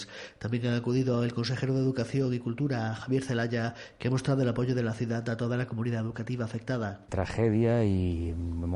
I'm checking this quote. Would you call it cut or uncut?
uncut